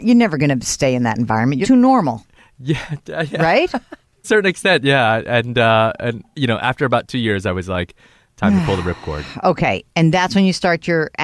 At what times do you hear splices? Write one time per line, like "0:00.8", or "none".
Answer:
0:01.6
0:04.2